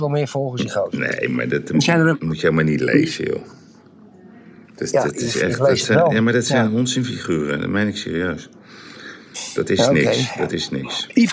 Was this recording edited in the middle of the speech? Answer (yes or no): no